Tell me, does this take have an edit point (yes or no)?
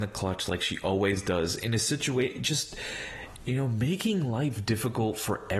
no